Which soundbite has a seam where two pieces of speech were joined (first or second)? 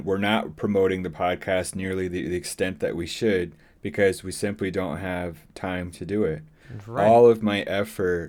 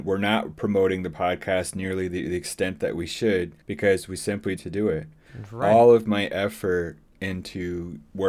second